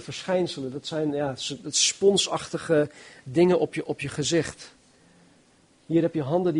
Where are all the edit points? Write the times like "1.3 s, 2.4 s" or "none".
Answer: none